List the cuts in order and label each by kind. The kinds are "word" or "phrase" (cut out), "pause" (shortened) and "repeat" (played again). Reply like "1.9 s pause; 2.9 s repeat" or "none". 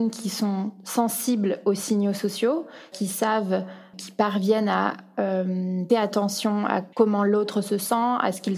2.9 s word; 3.9 s word; 5.9 s word; 6.9 s pause